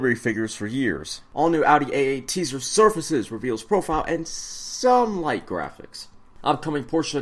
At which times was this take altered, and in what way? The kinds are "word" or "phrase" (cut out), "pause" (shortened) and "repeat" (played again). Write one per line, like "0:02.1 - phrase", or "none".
none